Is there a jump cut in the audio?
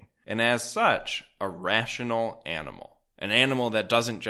no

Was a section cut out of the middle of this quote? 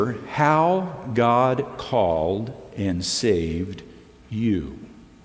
no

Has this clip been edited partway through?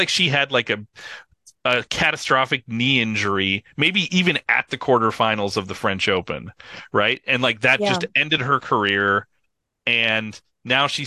no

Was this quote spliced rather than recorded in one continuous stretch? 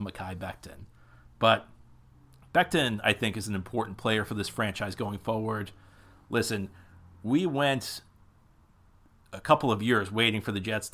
no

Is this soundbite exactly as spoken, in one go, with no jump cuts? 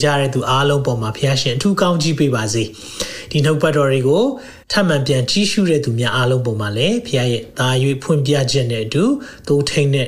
no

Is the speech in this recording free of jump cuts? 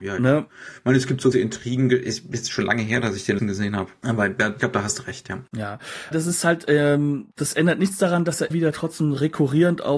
no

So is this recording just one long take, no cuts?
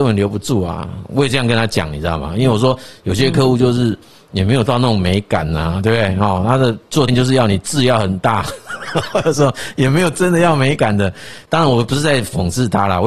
no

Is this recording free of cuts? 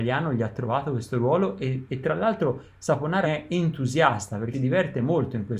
no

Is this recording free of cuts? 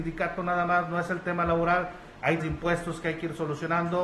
no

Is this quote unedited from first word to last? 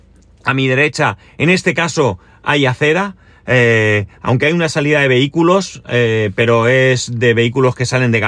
yes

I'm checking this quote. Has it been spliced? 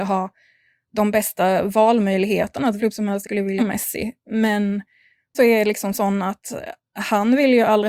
yes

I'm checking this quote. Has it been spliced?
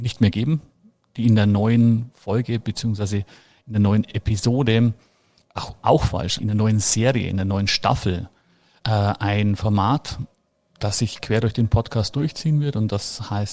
yes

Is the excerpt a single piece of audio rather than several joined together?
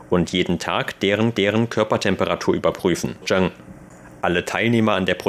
no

